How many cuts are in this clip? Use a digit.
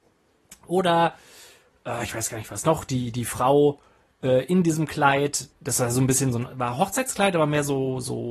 1